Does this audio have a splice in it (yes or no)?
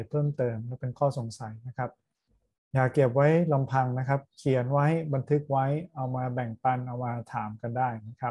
no